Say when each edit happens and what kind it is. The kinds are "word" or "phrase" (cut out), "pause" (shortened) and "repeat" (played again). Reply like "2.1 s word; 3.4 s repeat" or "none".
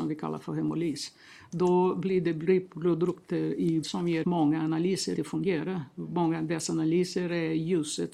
3.8 s word; 4.2 s word; 5.2 s word